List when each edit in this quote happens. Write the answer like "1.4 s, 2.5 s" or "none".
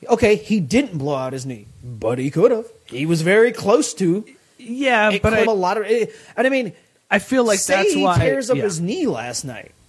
5.4 s